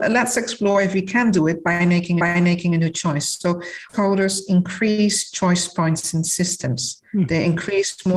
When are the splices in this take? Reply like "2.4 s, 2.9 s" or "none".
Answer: 2.2 s, 3.9 s, 7.1 s